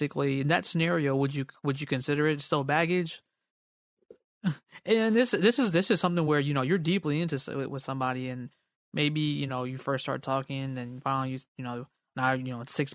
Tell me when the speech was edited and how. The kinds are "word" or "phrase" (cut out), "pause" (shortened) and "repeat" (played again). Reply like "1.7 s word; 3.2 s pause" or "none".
none